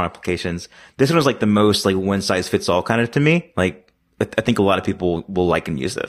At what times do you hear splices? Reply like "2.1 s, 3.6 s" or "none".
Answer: none